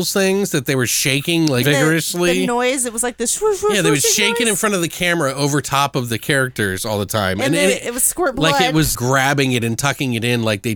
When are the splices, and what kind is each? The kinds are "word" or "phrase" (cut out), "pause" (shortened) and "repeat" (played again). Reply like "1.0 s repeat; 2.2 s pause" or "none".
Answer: 1.6 s word; 8.9 s word